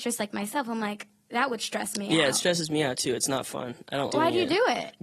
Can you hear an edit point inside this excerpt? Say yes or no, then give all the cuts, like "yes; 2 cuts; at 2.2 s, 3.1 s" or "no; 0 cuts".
yes; 1 cut; at 4.1 s